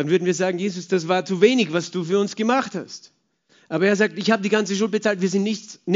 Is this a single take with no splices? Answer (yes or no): yes